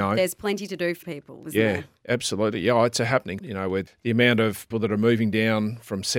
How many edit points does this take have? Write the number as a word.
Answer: four